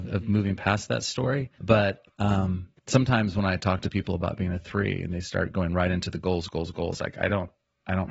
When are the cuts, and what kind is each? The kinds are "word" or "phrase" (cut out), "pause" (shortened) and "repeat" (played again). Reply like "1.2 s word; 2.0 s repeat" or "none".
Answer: 1.5 s pause